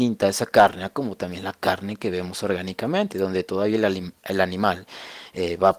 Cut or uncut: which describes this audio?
uncut